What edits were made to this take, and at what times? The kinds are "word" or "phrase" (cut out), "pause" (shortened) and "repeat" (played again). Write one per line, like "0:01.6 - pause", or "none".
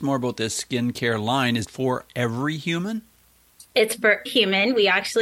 0:01.6 - word
0:04.3 - word